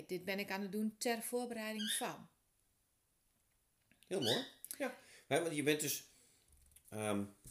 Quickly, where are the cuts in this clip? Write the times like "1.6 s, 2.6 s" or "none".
none